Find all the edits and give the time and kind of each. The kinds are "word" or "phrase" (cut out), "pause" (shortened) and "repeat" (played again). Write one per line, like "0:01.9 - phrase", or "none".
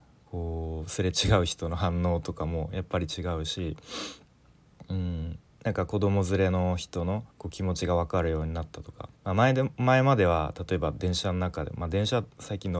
0:05.5 - pause
0:07.3 - pause
0:09.2 - pause